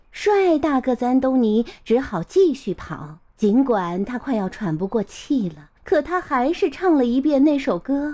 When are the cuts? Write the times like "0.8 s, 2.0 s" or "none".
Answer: 3.3 s, 5.8 s